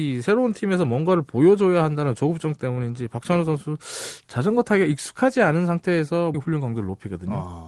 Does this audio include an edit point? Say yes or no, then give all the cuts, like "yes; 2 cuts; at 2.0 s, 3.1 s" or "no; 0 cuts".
yes; 1 cut; at 6.3 s